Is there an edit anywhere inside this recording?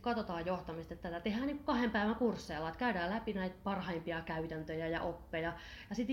no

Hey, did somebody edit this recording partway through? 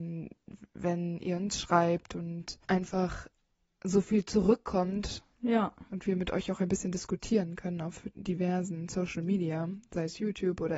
yes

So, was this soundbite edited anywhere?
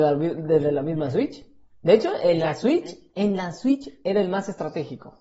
no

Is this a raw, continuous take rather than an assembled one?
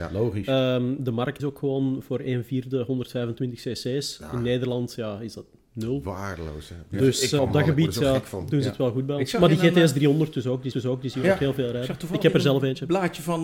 no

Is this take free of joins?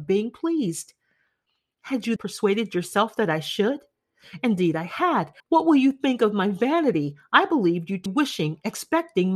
no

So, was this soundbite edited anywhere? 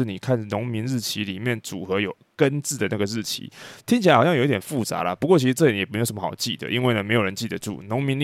no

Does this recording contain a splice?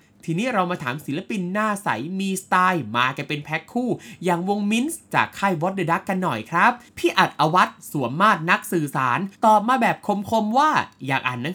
yes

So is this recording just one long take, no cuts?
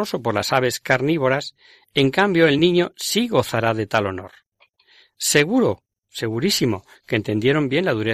yes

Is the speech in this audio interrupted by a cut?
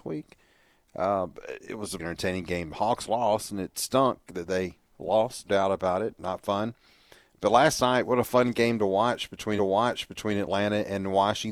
yes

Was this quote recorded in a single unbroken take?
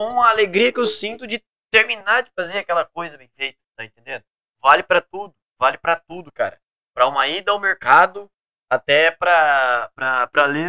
yes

